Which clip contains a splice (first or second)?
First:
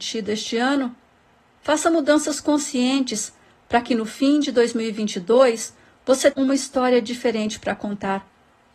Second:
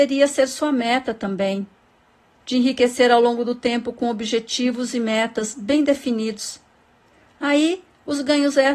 first